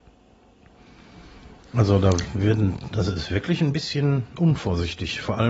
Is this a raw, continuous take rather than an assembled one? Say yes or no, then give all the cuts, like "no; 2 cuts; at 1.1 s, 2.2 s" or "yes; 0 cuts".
yes; 0 cuts